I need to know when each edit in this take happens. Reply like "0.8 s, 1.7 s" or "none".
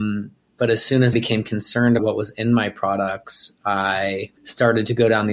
1.1 s, 2.0 s, 4.4 s